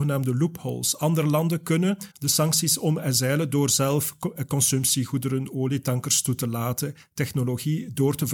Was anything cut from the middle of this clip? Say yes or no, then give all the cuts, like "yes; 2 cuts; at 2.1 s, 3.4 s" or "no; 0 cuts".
yes; 1 cut; at 2.1 s